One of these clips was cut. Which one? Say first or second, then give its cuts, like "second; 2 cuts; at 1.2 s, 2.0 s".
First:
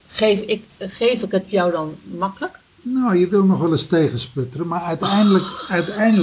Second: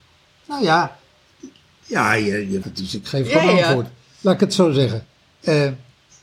second; 1 cut; at 2.6 s